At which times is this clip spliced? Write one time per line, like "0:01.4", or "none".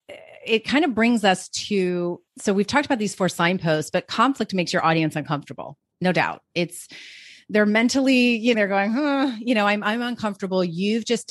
0:02.3
0:08.5